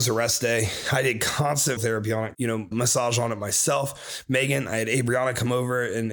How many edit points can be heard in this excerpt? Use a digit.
3